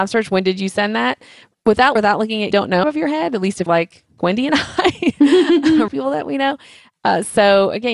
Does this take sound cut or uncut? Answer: cut